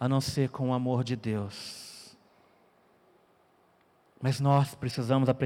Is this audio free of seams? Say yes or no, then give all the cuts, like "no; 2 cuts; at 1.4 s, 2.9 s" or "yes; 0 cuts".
yes; 0 cuts